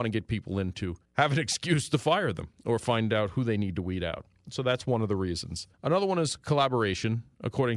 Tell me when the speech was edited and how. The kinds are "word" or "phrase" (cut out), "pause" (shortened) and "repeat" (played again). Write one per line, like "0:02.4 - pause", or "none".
0:01.1 - pause
0:05.7 - pause